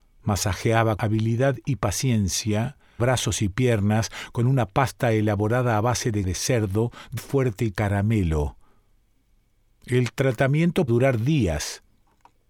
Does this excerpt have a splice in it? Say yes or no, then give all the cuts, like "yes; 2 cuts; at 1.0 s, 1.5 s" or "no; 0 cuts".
yes; 6 cuts; at 1.0 s, 3.0 s, 6.2 s, 7.2 s, 7.7 s, 10.9 s